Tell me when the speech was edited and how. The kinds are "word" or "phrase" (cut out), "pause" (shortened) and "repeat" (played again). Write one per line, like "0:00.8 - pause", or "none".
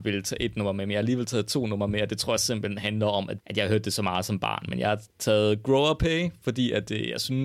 none